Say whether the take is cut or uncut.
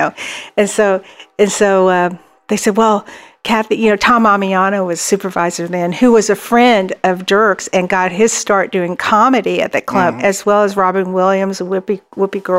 uncut